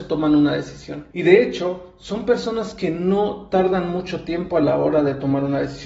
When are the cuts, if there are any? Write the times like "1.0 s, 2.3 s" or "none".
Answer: 1.1 s